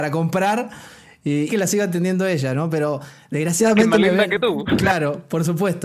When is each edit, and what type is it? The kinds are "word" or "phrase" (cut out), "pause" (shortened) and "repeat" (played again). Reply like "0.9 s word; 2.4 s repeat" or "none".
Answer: 1.5 s phrase